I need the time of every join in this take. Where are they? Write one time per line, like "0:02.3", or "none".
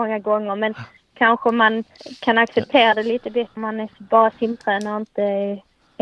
0:03.6